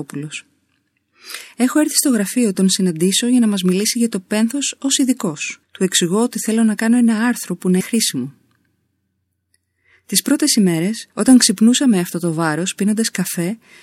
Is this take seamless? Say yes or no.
no